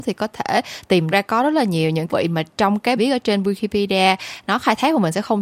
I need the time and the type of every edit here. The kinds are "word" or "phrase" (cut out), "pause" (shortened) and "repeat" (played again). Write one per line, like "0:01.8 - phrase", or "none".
0:01.1 - phrase
0:02.1 - phrase
0:02.5 - pause
0:03.0 - word